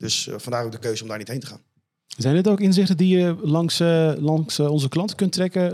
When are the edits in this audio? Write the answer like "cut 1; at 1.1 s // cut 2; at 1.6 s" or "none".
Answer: none